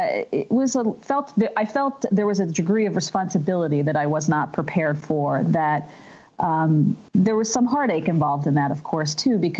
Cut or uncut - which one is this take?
cut